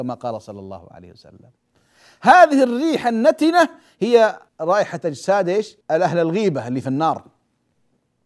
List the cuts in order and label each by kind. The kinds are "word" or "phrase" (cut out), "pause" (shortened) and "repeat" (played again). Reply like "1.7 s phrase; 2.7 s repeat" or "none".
4.5 s pause; 5.8 s pause